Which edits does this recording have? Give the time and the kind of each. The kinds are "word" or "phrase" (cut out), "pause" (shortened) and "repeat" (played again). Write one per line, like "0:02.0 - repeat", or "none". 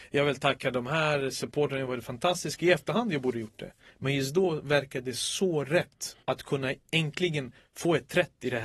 0:06.2 - pause